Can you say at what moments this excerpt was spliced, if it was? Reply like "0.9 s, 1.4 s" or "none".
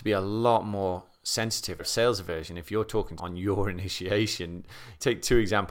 1.8 s, 3.2 s